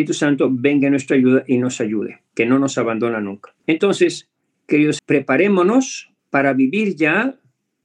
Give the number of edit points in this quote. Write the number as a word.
three